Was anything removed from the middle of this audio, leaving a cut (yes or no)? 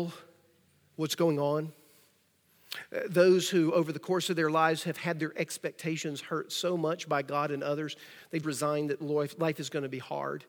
yes